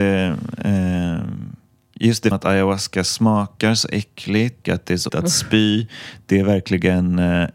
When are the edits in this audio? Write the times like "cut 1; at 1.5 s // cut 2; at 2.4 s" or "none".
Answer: cut 1; at 2.3 s // cut 2; at 4.6 s // cut 3; at 5.1 s